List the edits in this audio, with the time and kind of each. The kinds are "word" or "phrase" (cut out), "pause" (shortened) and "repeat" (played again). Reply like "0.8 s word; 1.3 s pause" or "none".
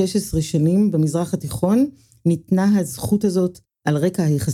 none